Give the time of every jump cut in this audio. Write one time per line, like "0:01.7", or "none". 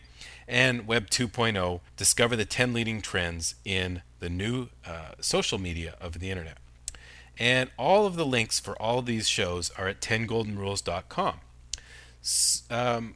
0:01.9